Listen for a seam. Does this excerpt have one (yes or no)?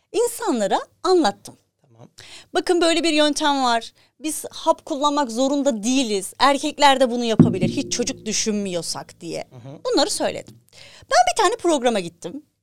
no